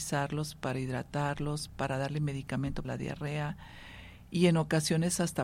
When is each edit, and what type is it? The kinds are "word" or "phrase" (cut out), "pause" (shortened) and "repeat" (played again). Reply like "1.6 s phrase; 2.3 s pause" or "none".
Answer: 2.8 s word